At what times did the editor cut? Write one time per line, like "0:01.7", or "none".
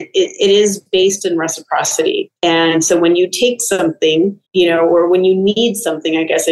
0:02.4
0:04.5